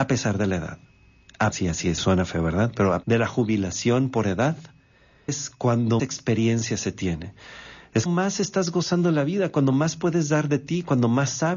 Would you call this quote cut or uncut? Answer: cut